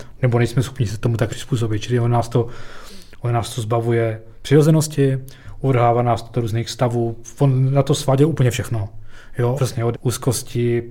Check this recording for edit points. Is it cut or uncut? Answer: cut